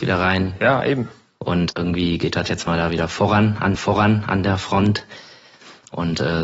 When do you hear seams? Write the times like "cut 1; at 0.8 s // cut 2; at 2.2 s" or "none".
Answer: cut 1; at 1.7 s // cut 2; at 3.8 s

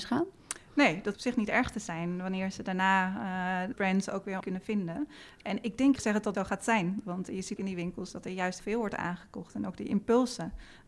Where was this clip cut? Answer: cut 1; at 1.1 s // cut 2; at 3.7 s // cut 3; at 4.4 s // cut 4; at 6.0 s // cut 5; at 6.3 s // cut 6; at 7.6 s // cut 7; at 8.6 s

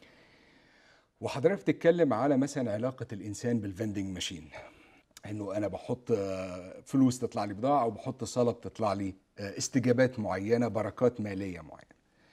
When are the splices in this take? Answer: cut 1; at 5.0 s

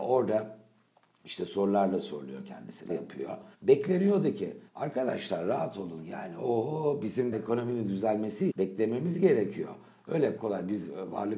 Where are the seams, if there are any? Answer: cut 1; at 2.9 s // cut 2; at 3.5 s // cut 3; at 4.7 s // cut 4; at 7.3 s // cut 5; at 8.5 s // cut 6; at 10.4 s

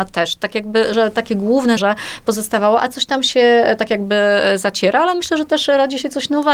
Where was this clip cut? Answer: cut 1; at 0.9 s // cut 2; at 1.8 s

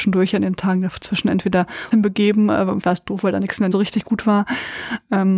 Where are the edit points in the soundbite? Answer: cut 1; at 1.9 s // cut 2; at 2.8 s // cut 3; at 3.7 s

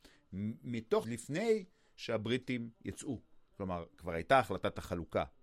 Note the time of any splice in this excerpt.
cut 1; at 1.0 s // cut 2; at 3.5 s

